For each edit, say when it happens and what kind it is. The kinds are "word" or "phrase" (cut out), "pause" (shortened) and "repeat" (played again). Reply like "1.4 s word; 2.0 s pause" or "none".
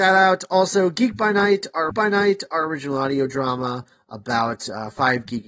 1.9 s repeat

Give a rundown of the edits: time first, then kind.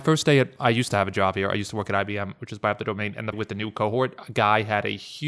3.3 s phrase

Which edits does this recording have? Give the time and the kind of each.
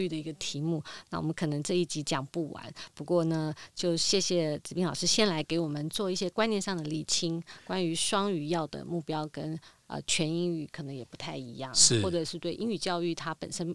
none

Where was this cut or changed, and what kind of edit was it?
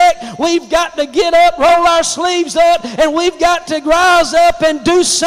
none

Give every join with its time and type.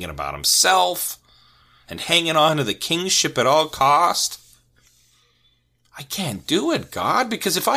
none

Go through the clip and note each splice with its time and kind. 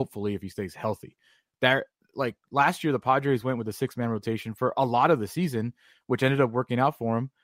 none

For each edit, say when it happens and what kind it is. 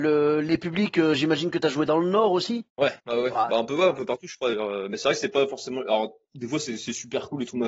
3.0 s pause

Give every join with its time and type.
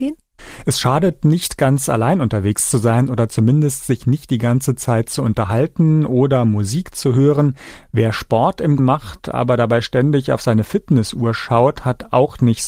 8.8 s word

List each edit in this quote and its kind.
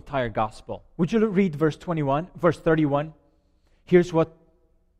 none

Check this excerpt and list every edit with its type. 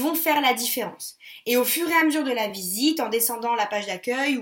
none

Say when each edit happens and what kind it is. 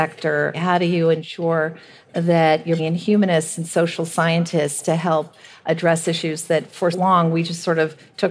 2.8 s word; 6.9 s word

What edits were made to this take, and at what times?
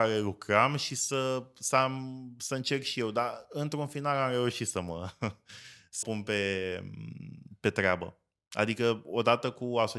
6.0 s word

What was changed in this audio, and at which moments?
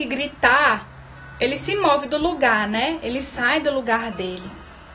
none

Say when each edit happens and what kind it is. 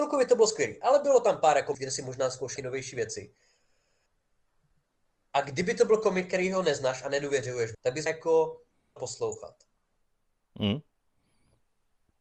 1.7 s word; 2.6 s word; 7.7 s word; 8.1 s word; 9.0 s word

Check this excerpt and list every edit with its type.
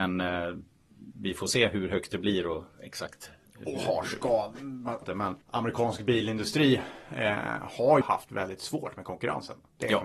5.0 s phrase; 5.4 s pause; 8.0 s word

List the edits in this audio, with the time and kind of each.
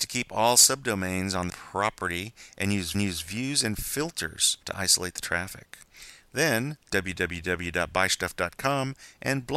1.5 s word; 2.9 s repeat; 4.6 s pause; 6.8 s pause

